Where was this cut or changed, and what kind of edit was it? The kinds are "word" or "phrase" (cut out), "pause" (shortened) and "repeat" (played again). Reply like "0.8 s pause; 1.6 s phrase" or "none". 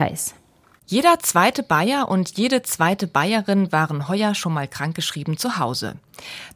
none